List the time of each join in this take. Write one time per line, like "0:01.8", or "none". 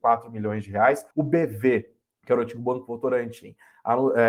0:01.1
0:02.0